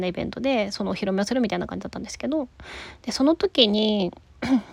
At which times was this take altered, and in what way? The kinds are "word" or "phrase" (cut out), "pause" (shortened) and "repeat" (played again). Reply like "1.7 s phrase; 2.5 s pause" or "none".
none